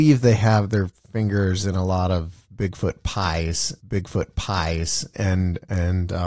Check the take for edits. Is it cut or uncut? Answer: cut